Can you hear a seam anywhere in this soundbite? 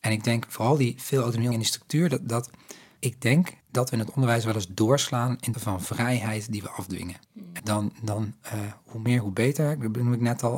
yes; 6 cuts; at 1.5 s, 3.0 s, 3.6 s, 5.5 s, 7.2 s, 7.6 s

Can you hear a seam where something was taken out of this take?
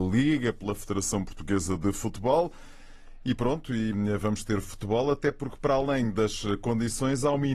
no; 0 cuts

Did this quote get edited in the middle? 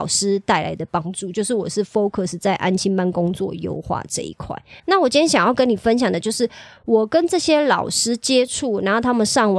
yes; 1 cut; at 4.8 s

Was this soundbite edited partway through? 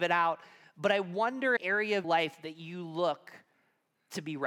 yes; 2 cuts; at 1.6 s, 2.0 s

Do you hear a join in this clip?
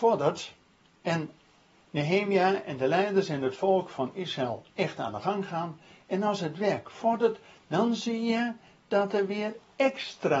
no; 0 cuts

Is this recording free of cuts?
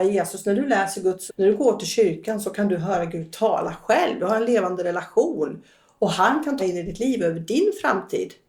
no; 2 cuts; at 1.3 s, 6.6 s

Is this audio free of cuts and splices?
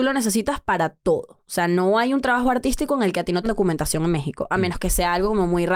no; 1 cut; at 3.4 s

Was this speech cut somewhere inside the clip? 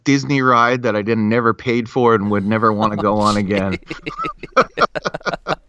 no; 0 cuts

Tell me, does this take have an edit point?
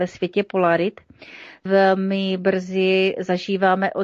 yes; 1 cut; at 1.7 s

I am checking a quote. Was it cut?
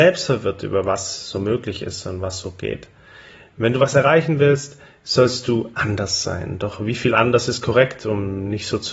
no; 0 cuts

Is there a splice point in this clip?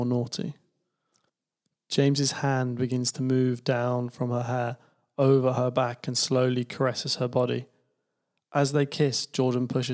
no; 0 cuts

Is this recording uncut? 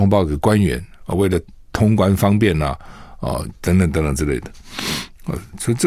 yes; 0 cuts

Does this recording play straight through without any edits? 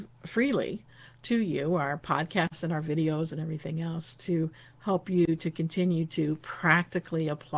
yes; 0 cuts

